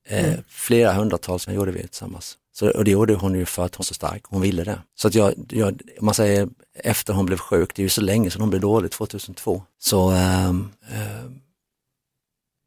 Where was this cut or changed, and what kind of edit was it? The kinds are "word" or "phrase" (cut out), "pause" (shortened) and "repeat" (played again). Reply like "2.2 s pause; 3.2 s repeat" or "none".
1.5 s word; 2.4 s pause; 3.8 s word; 4.9 s pause; 9.7 s pause; 10.8 s pause

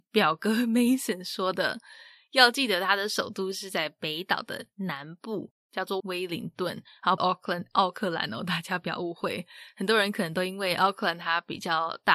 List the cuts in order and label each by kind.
6.0 s word; 7.2 s phrase

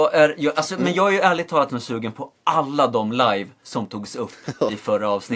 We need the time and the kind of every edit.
1.7 s word

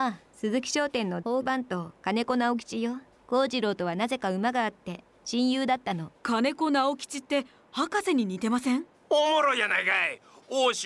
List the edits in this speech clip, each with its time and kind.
3.1 s pause; 6.2 s pause

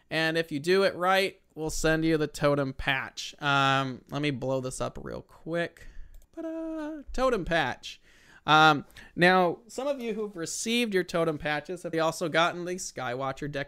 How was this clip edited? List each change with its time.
6.2 s pause; 11.9 s word

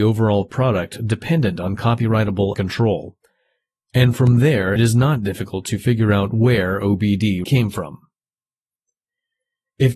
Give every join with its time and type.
2.5 s word; 4.8 s word; 7.4 s word

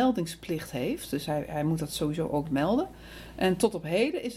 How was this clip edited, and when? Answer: none

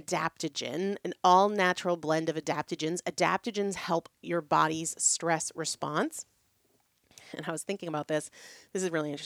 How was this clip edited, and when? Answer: none

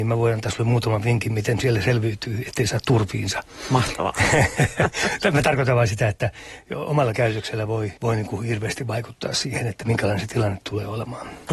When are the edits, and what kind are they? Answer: 8.0 s pause

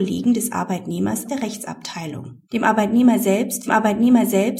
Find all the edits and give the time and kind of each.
1.3 s word; 2.4 s pause; 3.7 s repeat

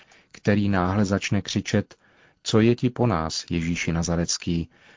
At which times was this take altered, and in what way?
none

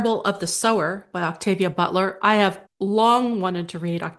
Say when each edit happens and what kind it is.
2.7 s pause

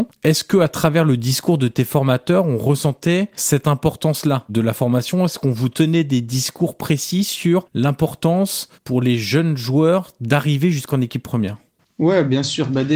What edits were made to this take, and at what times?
none

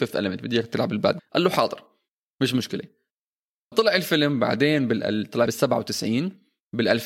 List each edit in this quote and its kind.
1.2 s word; 3.7 s word; 5.5 s word

